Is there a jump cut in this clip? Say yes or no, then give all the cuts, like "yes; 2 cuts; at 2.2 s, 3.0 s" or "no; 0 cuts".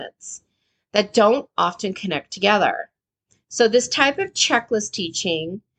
no; 0 cuts